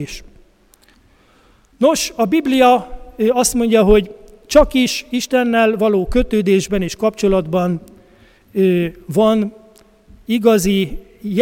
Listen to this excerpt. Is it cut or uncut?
uncut